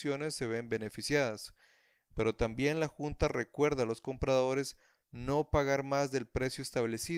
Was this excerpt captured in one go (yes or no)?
yes